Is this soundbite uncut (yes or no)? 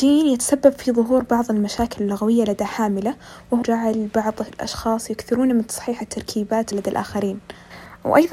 no